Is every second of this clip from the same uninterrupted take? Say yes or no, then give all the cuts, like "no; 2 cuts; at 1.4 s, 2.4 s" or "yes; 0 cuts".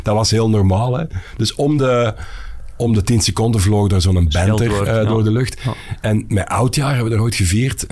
yes; 0 cuts